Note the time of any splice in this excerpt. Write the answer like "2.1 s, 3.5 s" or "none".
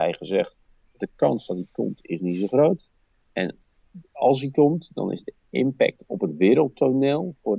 none